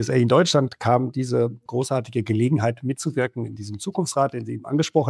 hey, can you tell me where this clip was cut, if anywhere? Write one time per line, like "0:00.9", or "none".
0:01.7
0:03.6